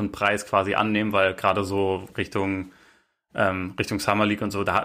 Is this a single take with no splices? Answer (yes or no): yes